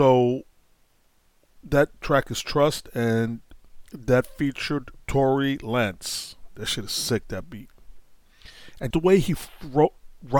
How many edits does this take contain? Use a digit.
2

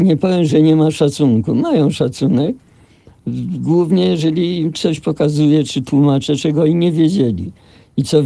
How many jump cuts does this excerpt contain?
0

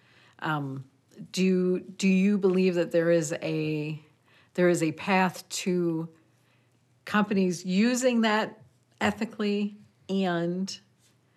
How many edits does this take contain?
0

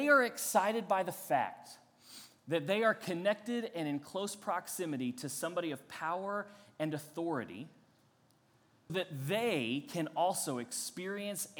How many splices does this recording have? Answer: 1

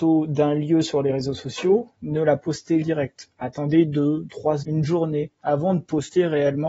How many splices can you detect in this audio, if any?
2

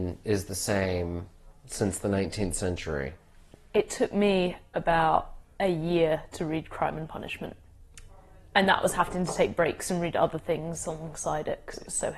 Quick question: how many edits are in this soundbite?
0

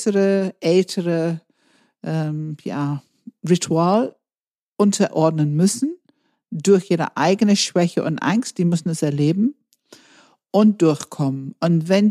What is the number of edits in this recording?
0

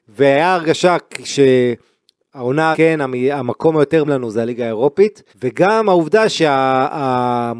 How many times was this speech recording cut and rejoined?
3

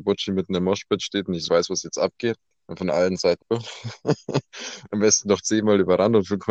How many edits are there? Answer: 3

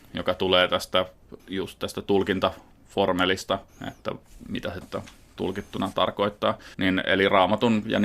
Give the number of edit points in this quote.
5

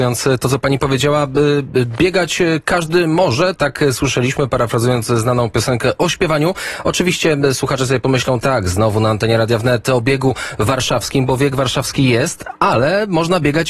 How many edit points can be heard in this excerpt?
2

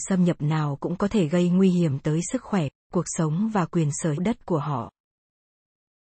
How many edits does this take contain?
1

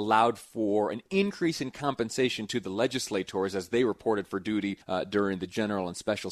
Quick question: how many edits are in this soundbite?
1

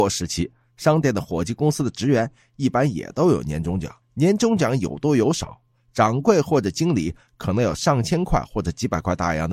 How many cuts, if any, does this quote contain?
1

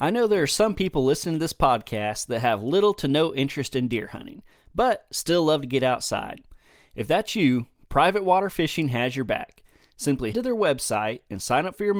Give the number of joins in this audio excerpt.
1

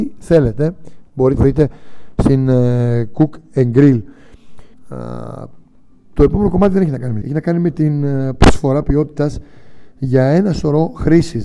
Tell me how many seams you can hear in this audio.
3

